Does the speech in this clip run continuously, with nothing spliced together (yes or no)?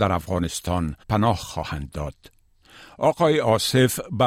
no